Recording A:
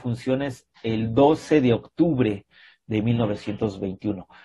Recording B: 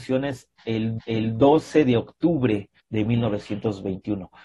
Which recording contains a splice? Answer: B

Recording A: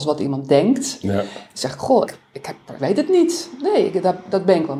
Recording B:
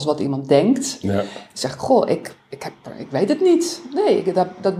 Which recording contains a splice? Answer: A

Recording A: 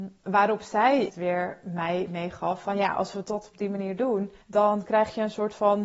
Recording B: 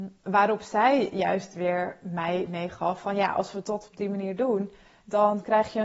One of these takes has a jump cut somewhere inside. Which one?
A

